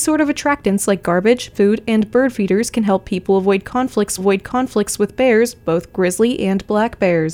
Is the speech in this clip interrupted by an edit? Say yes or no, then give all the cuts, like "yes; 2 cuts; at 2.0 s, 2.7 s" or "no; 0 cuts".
yes; 2 cuts; at 1.5 s, 4.2 s